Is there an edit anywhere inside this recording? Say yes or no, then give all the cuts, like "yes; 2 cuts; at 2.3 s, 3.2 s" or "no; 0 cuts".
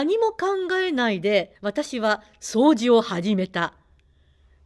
yes; 1 cut; at 1.6 s